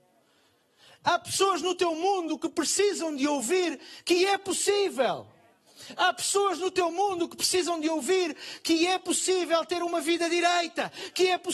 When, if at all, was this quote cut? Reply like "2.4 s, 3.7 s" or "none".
none